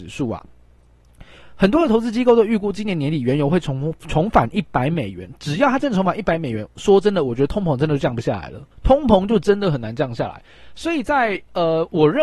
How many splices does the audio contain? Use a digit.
1